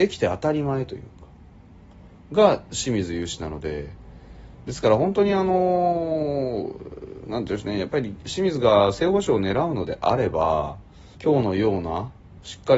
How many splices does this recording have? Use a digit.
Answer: 1